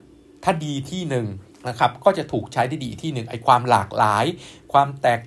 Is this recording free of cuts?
no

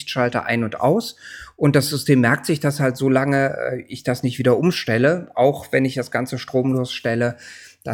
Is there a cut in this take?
no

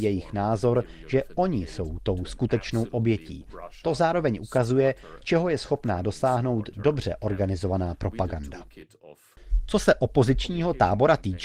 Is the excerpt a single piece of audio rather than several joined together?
yes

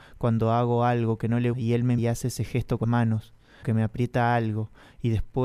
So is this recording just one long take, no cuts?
no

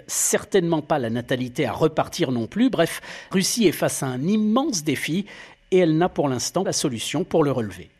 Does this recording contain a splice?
yes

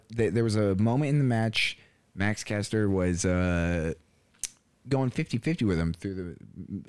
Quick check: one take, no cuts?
yes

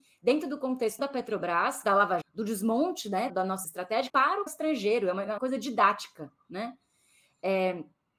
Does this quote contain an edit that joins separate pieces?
yes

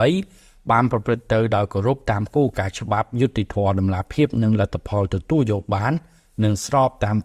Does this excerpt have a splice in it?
no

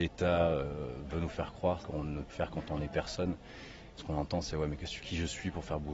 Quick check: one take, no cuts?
no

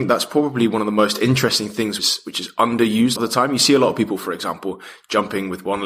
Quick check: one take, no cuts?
no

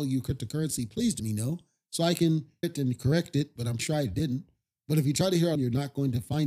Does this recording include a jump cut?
yes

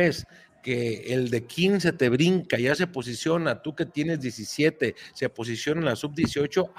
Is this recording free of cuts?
yes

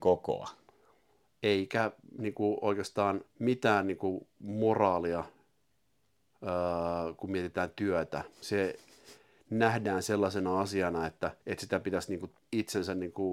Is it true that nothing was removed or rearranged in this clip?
no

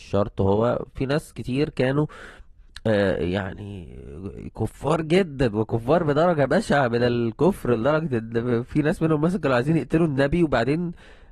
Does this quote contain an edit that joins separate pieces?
no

